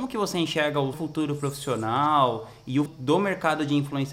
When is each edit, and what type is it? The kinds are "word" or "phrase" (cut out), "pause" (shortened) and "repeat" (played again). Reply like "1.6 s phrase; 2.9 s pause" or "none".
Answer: 0.9 s word; 2.9 s word